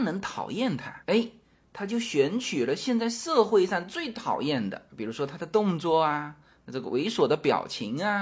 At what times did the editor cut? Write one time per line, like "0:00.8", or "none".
none